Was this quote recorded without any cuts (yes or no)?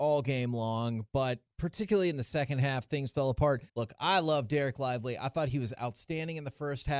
no